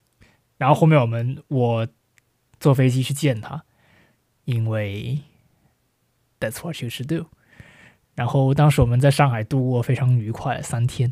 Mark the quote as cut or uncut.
uncut